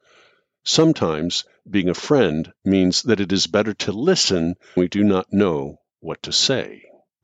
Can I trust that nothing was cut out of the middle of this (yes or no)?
no